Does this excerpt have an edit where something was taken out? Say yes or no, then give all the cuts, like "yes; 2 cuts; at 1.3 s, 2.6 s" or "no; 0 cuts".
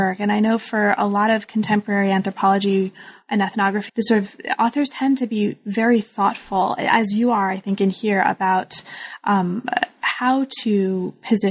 yes; 1 cut; at 3.9 s